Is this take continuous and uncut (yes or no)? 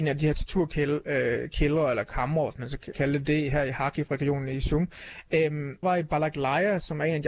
no